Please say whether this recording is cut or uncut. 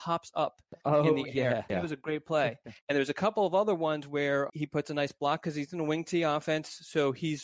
cut